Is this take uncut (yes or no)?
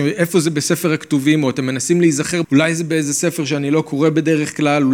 no